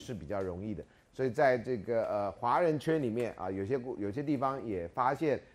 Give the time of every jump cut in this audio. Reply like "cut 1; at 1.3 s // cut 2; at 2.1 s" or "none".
none

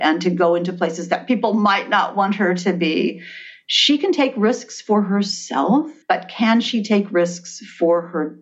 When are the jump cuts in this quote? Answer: cut 1; at 6.0 s

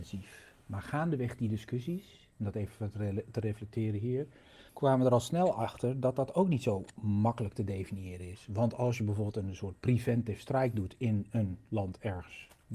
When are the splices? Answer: cut 1; at 2.3 s // cut 2; at 4.7 s

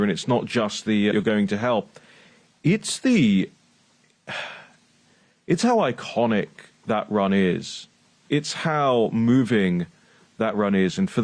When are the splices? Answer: cut 1; at 1.1 s

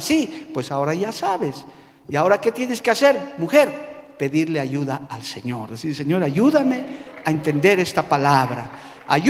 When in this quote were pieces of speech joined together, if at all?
none

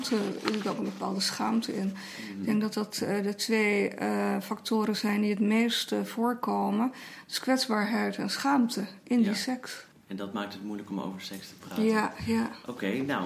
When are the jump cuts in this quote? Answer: none

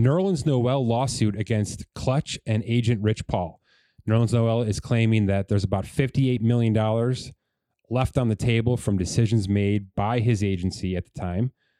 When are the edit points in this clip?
none

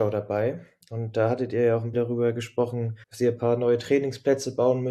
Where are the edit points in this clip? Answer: cut 1; at 1.9 s // cut 2; at 3.0 s

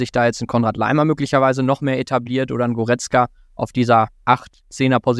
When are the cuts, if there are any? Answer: none

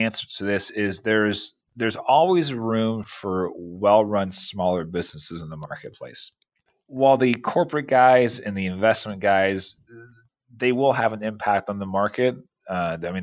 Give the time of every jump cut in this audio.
cut 1; at 3.0 s

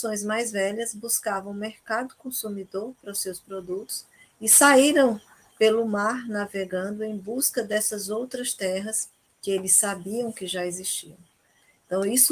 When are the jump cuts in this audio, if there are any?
none

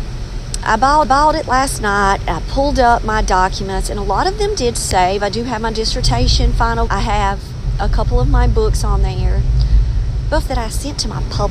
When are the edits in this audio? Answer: cut 1; at 1.0 s // cut 2; at 6.9 s // cut 3; at 10.4 s

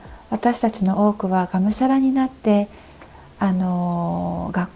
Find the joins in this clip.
none

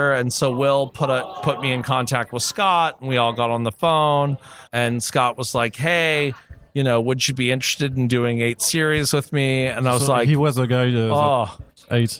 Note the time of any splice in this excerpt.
cut 1; at 4.7 s

